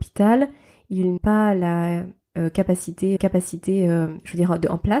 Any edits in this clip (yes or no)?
yes